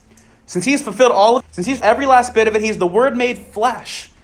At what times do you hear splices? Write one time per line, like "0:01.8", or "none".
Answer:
0:01.4
0:01.8